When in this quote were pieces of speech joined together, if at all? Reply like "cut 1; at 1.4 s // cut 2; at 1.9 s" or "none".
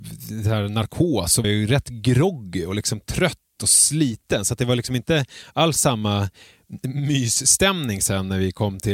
cut 1; at 1.4 s